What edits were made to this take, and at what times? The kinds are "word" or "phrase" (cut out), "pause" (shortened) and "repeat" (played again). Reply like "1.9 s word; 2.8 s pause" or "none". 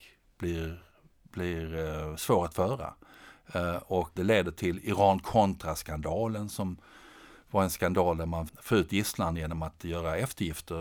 4.2 s word; 8.5 s word